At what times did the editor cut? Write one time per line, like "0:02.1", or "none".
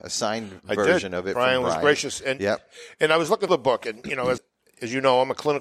0:03.5
0:04.4